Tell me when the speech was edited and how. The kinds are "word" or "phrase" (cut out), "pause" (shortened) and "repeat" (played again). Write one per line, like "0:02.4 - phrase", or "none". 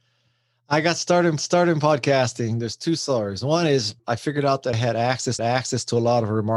0:01.4 - repeat
0:04.7 - word
0:05.4 - repeat